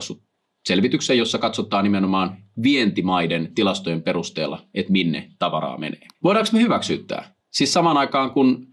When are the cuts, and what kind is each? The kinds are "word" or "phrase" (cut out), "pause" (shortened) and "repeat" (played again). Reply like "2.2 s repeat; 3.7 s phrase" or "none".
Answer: 6.1 s pause; 7.4 s pause

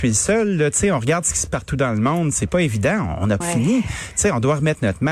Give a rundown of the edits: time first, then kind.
1.5 s word; 2.5 s word; 3.4 s word

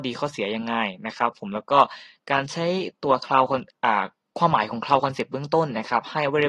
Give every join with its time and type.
none

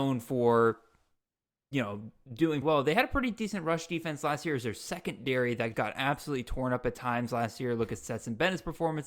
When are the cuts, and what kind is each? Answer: 2.6 s word; 5.7 s word

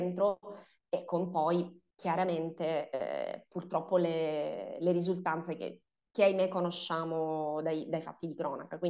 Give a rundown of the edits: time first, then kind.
1.9 s pause

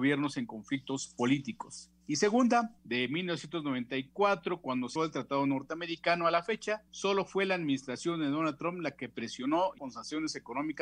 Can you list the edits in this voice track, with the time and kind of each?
2.8 s pause; 5.0 s word; 6.9 s pause; 9.8 s word

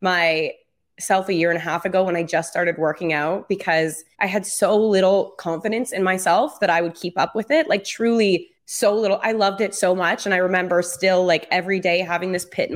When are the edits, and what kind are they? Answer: 4.1 s pause; 8.5 s pause

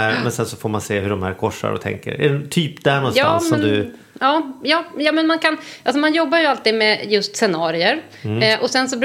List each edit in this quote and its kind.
none

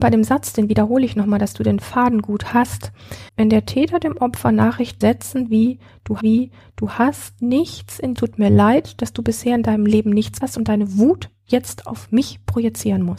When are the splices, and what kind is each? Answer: 3.3 s pause; 5.0 s phrase; 6.2 s repeat; 8.2 s phrase; 10.4 s word

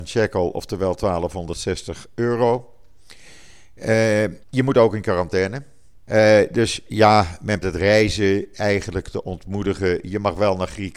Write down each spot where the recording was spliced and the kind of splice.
4.4 s pause; 6.0 s pause; 7.6 s word

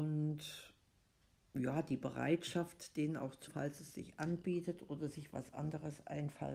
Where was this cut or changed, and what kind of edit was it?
3.5 s word

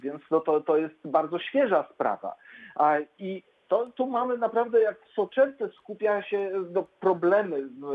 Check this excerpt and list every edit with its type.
none

